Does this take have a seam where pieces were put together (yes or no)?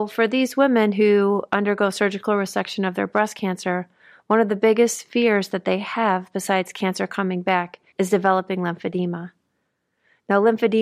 yes